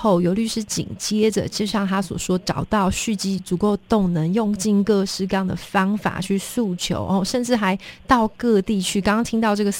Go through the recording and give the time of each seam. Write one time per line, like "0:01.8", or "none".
none